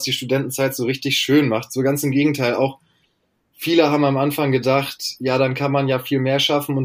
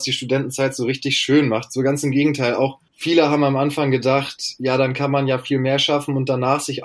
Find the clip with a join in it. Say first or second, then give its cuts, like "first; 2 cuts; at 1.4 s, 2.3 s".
second; 1 cut; at 2.9 s